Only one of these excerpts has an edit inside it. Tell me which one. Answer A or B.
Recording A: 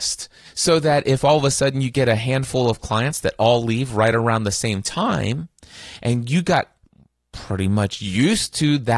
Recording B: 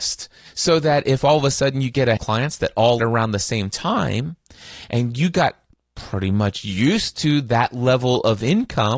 B